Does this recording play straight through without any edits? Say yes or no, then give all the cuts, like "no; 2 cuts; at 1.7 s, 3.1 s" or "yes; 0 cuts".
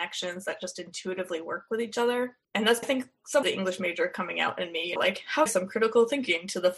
no; 5 cuts; at 2.4 s, 2.8 s, 3.4 s, 5.0 s, 5.5 s